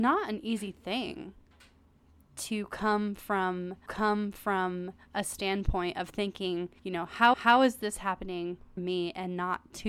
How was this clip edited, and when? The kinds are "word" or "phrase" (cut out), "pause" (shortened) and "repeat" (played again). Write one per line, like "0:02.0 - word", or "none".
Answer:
0:03.9 - repeat
0:06.8 - pause
0:07.3 - repeat
0:08.8 - word